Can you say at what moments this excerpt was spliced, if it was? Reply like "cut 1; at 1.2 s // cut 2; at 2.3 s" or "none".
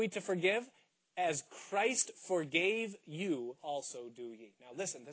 cut 1; at 3.6 s